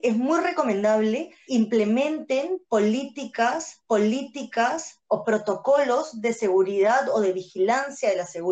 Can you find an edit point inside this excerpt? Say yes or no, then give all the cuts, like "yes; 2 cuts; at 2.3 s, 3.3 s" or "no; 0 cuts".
yes; 2 cuts; at 1.5 s, 3.8 s